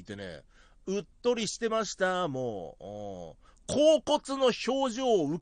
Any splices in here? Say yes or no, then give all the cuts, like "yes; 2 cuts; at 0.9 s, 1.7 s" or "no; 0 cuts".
no; 0 cuts